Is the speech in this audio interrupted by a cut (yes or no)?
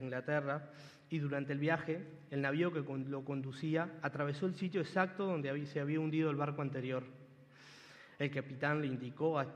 no